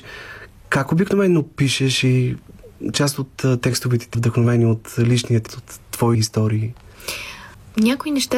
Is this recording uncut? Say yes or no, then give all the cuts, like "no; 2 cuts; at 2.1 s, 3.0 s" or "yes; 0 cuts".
no; 4 cuts; at 2.9 s, 4.1 s, 5.5 s, 6.1 s